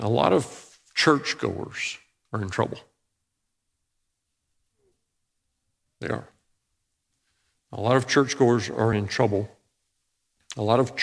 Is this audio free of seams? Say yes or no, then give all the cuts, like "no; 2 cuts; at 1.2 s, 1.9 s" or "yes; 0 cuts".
yes; 0 cuts